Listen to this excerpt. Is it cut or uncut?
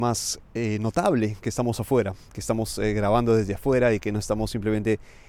uncut